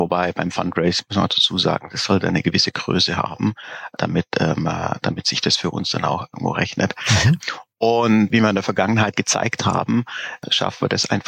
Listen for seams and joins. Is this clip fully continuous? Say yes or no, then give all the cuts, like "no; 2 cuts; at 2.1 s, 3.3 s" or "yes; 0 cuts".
yes; 0 cuts